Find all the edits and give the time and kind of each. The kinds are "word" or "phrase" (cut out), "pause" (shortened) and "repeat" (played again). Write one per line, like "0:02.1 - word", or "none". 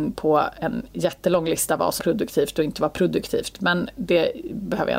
0:02.0 - word